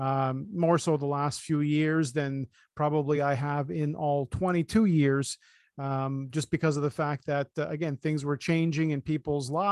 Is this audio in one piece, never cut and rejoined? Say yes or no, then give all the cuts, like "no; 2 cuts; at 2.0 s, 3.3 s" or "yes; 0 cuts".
yes; 0 cuts